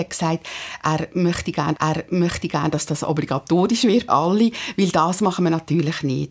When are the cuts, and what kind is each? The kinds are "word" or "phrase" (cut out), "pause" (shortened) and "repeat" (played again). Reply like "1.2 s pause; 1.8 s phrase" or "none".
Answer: 1.7 s repeat; 4.1 s word